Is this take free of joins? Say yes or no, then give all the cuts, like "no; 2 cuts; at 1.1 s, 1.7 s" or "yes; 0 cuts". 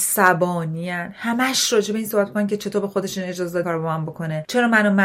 no; 1 cut; at 3.6 s